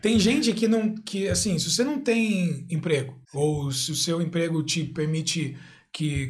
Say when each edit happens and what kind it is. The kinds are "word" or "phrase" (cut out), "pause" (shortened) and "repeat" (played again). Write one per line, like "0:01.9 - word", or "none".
0:03.2 - pause